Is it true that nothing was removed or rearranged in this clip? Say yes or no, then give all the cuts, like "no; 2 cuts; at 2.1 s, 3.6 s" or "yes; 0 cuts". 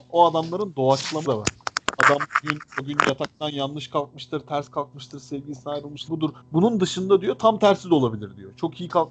no; 3 cuts; at 1.2 s, 6.1 s, 6.4 s